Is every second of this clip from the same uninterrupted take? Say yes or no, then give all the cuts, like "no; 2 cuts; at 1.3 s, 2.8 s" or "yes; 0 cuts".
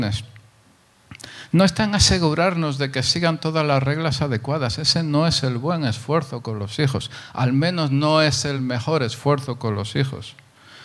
yes; 0 cuts